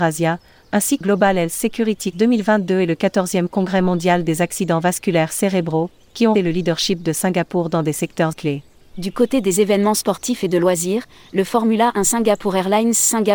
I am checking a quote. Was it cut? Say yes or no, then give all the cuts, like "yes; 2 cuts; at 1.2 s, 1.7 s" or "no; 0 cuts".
yes; 4 cuts; at 1.0 s, 2.1 s, 6.3 s, 8.3 s